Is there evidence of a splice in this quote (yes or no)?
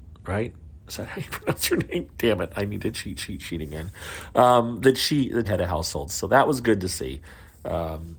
yes